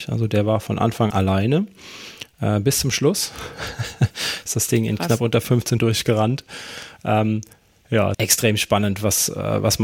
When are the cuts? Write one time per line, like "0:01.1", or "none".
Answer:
0:01.1
0:05.8
0:08.1